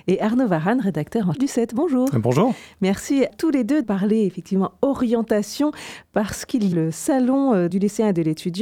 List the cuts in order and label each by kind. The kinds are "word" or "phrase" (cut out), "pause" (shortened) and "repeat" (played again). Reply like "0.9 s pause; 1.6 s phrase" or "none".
1.3 s word; 3.3 s word; 3.8 s phrase; 6.7 s word; 7.7 s word